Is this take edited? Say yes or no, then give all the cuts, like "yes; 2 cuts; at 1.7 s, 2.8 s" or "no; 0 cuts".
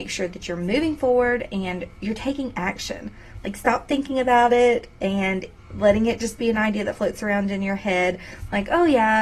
no; 0 cuts